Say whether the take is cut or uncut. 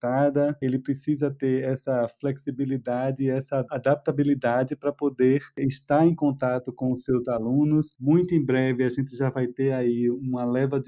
uncut